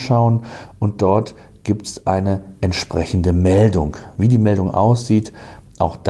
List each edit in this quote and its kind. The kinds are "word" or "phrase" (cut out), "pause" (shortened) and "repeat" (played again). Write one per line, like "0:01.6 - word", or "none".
none